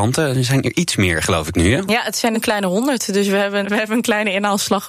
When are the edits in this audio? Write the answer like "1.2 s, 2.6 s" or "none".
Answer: 2.3 s, 3.6 s